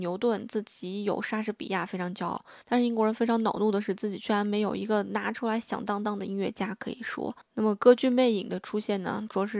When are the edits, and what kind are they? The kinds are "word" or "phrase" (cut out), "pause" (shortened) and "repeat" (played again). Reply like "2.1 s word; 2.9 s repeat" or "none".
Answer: 2.6 s pause